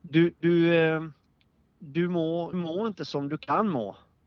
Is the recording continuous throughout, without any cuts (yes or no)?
no